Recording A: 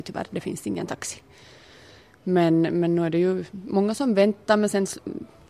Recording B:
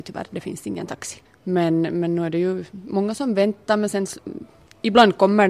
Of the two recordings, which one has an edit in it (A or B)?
B